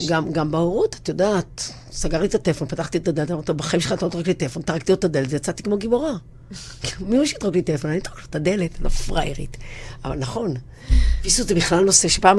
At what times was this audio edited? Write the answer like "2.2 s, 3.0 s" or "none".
1.8 s